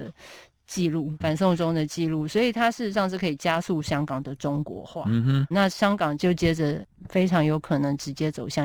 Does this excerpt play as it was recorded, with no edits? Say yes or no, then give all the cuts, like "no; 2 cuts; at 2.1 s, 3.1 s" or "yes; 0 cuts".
no; 2 cuts; at 1.2 s, 5.5 s